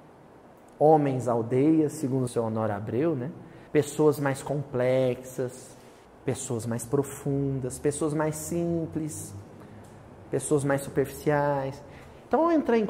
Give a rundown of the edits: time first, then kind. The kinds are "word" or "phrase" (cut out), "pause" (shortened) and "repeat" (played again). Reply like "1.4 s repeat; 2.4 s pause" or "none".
2.3 s phrase; 3.7 s pause; 6.1 s pause